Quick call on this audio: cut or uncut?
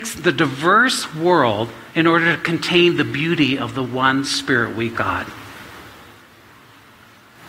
cut